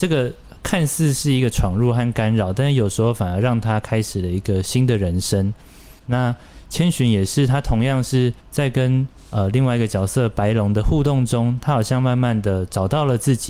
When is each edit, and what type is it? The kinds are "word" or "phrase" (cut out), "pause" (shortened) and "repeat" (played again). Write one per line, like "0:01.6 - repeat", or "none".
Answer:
0:06.0 - pause
0:08.4 - pause